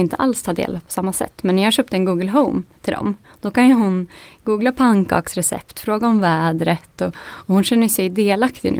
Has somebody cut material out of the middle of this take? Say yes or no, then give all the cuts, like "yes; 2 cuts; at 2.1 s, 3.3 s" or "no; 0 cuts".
no; 0 cuts